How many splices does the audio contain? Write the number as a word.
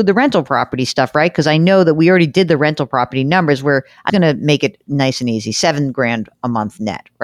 one